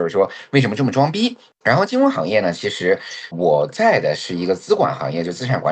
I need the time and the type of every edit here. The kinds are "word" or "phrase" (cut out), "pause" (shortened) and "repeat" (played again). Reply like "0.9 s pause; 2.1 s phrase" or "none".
3.3 s word